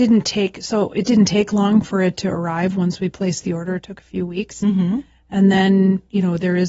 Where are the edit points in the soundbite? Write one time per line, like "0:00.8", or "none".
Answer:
none